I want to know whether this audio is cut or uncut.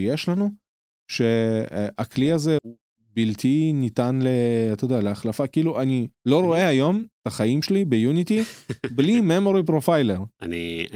cut